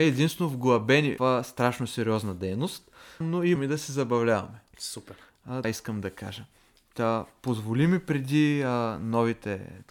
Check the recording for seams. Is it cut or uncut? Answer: cut